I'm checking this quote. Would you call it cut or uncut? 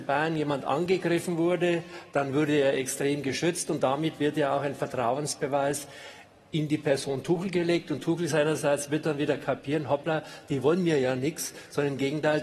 uncut